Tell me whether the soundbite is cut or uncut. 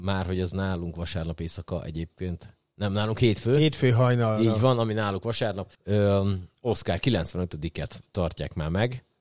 cut